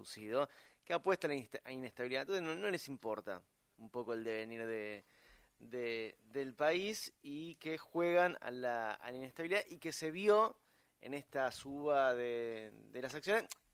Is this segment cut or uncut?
uncut